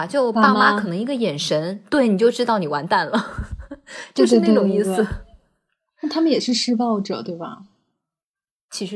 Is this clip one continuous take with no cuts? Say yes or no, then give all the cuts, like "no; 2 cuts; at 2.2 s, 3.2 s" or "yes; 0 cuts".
yes; 0 cuts